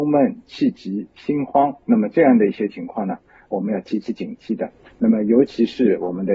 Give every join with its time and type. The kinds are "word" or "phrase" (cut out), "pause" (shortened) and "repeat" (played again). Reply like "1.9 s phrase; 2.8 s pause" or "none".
none